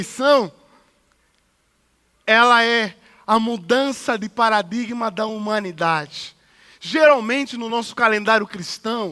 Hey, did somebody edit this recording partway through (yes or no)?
no